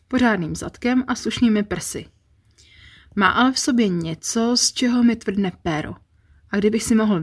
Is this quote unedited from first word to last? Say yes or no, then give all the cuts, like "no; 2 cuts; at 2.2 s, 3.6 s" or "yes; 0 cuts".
yes; 0 cuts